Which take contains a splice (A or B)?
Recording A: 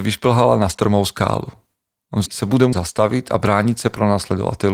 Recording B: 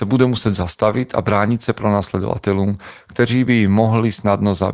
A